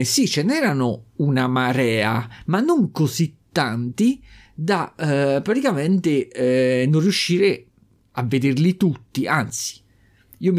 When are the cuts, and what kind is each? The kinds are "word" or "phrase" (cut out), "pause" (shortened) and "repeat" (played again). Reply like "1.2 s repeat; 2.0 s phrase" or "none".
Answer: none

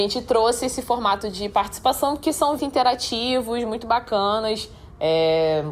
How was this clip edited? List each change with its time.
2.6 s phrase

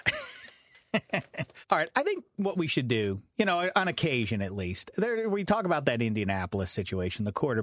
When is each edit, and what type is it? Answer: none

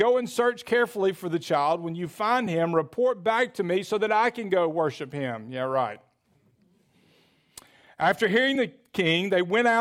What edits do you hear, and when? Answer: none

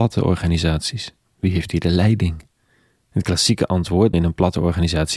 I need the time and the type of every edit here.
4.1 s word

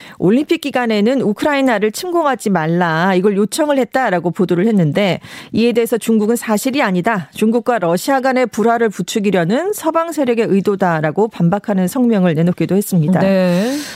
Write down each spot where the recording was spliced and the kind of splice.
none

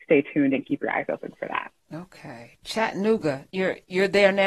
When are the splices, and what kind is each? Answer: 1.8 s pause

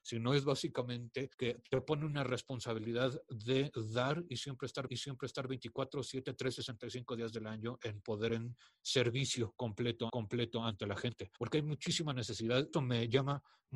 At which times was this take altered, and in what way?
1.3 s pause; 4.9 s repeat; 8.3 s word; 10.1 s repeat; 11.4 s pause; 12.7 s phrase

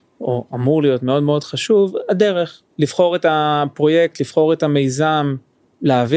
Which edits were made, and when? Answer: 2.7 s pause

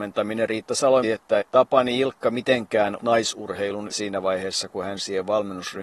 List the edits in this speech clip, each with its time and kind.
1.0 s word; 1.4 s word; 3.0 s word; 3.9 s word

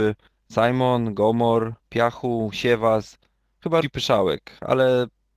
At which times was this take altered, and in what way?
1.8 s pause; 3.8 s word

